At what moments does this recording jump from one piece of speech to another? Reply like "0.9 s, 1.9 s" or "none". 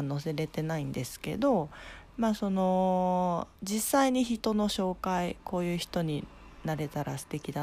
3.6 s